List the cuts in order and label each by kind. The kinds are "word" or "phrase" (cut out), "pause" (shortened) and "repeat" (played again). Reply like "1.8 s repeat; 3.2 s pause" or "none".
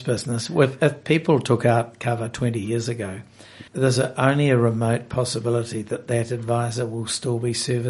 3.7 s pause